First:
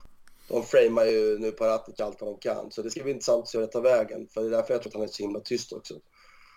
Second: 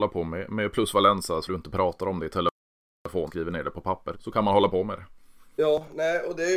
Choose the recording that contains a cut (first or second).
second